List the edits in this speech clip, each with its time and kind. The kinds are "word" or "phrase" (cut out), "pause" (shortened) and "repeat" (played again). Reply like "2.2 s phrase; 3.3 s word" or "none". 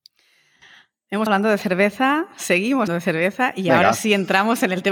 1.3 s word; 2.9 s word